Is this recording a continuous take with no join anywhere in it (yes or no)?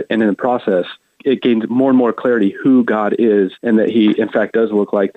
no